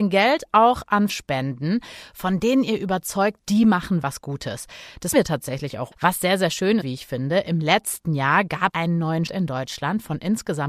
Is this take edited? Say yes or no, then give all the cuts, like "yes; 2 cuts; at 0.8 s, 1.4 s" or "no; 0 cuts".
yes; 8 cuts; at 1.1 s, 3.4 s, 4.0 s, 5.1 s, 5.9 s, 6.8 s, 8.7 s, 9.3 s